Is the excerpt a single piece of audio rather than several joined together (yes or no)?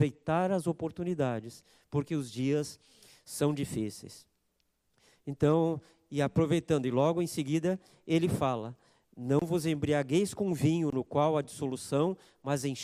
yes